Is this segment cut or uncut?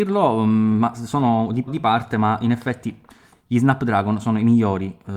cut